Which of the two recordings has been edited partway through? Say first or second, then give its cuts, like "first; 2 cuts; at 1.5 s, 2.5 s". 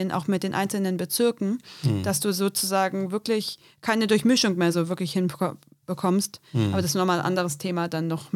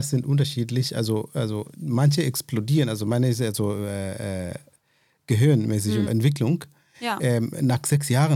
second; 1 cut; at 6.1 s